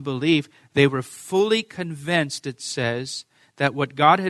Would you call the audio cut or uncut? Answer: uncut